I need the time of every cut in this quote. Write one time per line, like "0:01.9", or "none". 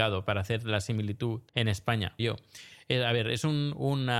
0:01.5
0:02.2